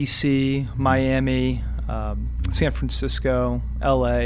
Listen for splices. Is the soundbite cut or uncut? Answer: uncut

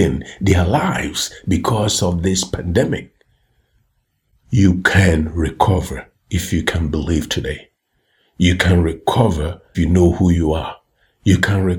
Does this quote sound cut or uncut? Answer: cut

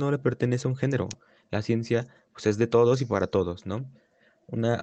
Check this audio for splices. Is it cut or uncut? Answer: uncut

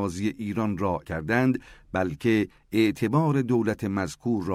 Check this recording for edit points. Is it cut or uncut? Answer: cut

